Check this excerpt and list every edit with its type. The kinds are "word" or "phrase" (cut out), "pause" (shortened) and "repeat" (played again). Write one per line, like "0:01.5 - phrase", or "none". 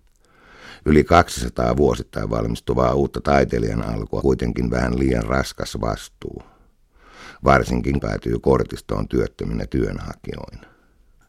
0:04.2 - word
0:08.0 - phrase